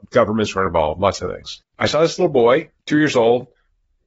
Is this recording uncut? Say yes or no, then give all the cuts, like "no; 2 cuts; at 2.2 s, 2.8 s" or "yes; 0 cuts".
no; 1 cut; at 2.8 s